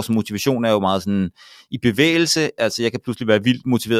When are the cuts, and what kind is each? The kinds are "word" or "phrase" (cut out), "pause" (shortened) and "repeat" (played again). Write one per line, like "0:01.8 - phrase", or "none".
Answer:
none

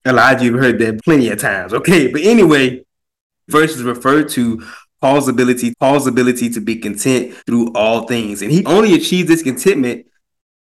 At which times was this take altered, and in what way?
0:01.0 - word
0:03.5 - word
0:05.7 - repeat
0:07.4 - pause
0:08.6 - word

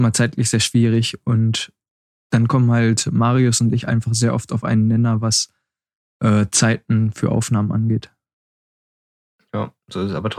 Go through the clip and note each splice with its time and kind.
none

